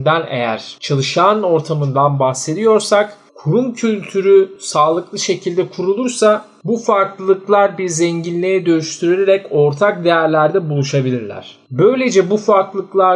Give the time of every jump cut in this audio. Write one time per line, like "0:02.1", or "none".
none